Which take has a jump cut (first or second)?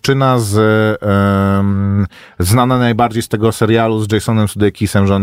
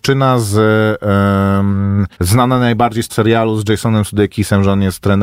second